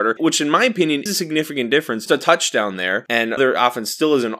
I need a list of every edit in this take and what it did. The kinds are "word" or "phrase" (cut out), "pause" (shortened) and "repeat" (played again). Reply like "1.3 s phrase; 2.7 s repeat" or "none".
1.1 s word; 2.1 s word; 3.4 s word